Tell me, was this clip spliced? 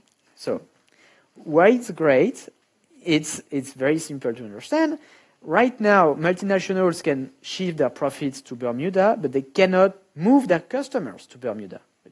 no; 0 cuts

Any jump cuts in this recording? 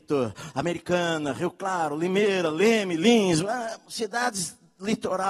no; 0 cuts

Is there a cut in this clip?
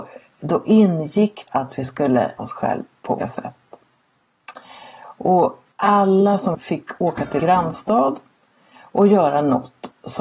yes; 6 cuts; at 1.5 s, 2.4 s, 3.2 s, 5.7 s, 6.5 s, 7.4 s

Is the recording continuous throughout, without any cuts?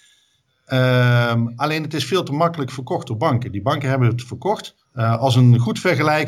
no; 1 cut; at 4.8 s

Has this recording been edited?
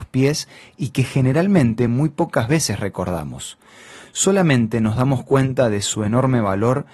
no; 0 cuts

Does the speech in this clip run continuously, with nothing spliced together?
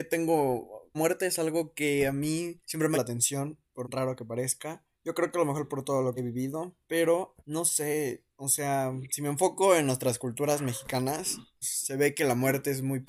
no; 8 cuts; at 0.9 s, 2.6 s, 2.9 s, 3.8 s, 4.9 s, 6.2 s, 7.4 s, 11.6 s

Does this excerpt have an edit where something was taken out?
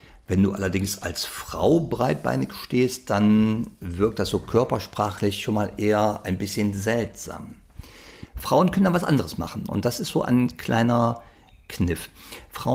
no; 0 cuts

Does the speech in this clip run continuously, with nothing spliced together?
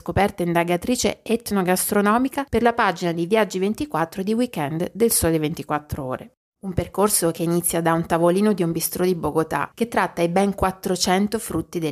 yes; 0 cuts

